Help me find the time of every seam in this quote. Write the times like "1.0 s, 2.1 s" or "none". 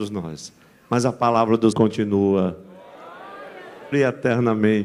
1.7 s, 3.9 s